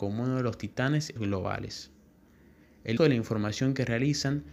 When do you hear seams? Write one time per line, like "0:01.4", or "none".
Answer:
0:01.2
0:03.0